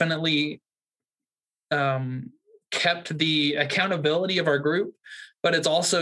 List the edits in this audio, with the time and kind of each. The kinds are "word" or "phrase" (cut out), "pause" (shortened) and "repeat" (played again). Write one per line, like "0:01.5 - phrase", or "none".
none